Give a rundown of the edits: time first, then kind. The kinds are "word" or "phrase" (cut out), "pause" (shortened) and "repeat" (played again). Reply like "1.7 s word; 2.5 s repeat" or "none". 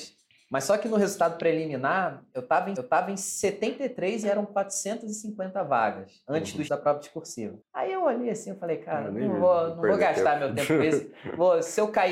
2.8 s repeat; 6.7 s word; 7.6 s pause